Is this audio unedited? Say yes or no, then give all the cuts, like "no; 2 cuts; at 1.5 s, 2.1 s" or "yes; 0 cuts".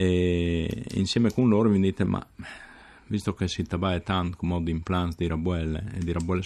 yes; 0 cuts